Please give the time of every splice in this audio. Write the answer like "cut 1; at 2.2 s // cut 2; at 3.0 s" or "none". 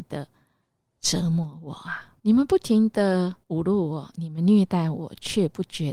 cut 1; at 2.2 s // cut 2; at 3.4 s